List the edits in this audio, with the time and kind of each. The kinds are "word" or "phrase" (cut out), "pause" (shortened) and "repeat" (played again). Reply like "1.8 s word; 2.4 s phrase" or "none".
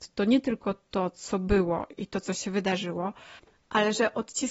none